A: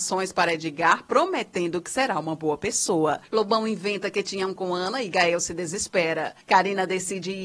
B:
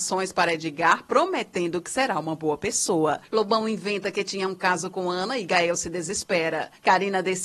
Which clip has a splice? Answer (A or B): A